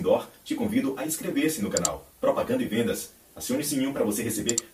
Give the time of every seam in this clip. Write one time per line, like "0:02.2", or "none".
0:02.1